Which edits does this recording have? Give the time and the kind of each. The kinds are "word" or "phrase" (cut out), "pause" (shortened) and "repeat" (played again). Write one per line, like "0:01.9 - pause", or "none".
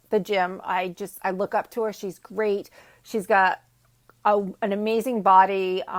none